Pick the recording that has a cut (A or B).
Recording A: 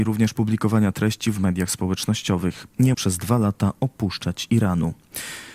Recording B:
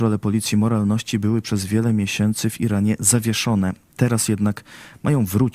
A